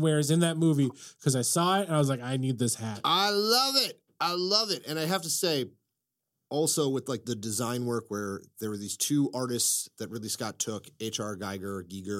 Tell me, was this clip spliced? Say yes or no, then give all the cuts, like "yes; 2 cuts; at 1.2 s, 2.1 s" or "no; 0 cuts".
no; 0 cuts